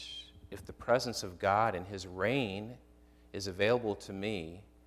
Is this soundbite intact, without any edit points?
yes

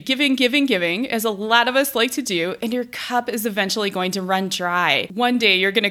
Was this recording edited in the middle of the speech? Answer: no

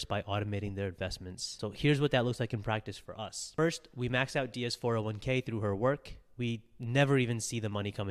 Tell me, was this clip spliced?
no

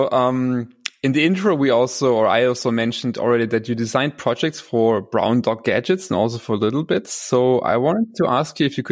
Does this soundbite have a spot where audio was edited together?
no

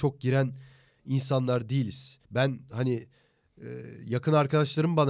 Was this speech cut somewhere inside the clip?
yes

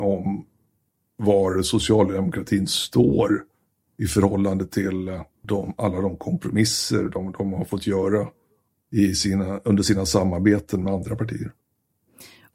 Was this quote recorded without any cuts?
yes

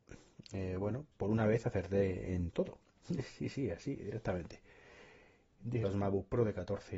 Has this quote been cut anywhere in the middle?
yes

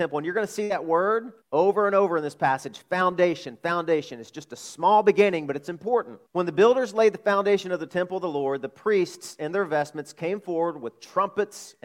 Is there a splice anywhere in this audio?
yes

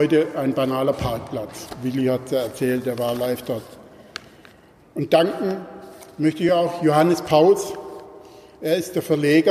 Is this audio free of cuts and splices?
yes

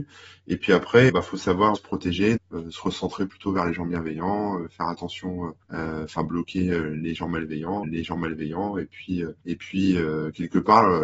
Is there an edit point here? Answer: yes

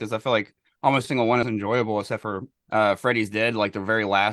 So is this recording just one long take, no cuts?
no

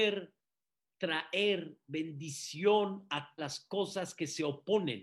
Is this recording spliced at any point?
yes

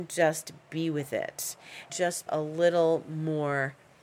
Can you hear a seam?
yes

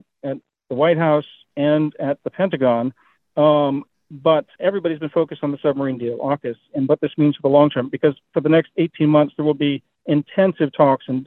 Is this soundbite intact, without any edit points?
no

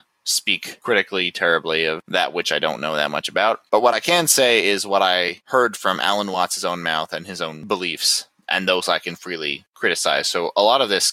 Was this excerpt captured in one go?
yes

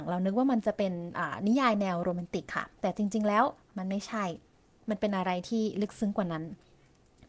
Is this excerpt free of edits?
yes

